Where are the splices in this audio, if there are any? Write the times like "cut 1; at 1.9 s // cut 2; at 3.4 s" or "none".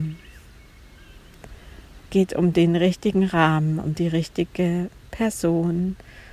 cut 1; at 2.1 s